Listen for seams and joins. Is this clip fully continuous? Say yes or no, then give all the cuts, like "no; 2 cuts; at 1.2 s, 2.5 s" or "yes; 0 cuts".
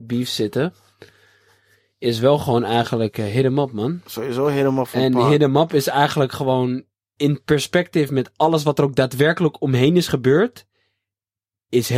yes; 0 cuts